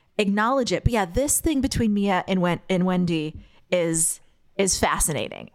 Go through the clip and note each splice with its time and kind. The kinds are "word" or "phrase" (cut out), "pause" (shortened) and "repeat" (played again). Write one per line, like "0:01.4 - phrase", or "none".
none